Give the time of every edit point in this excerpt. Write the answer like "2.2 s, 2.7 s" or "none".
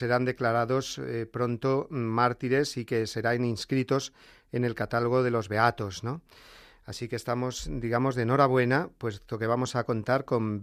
none